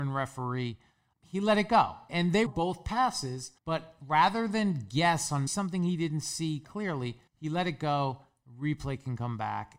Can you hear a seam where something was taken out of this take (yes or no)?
yes